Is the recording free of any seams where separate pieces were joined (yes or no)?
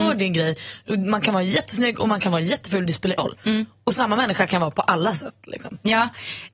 no